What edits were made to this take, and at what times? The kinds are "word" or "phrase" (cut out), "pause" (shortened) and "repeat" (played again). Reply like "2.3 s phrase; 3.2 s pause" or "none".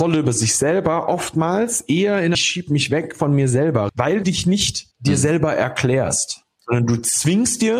2.3 s phrase; 3.9 s word; 4.2 s word; 4.9 s pause; 6.6 s pause